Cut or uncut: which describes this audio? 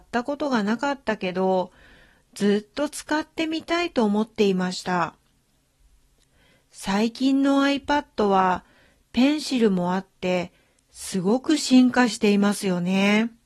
uncut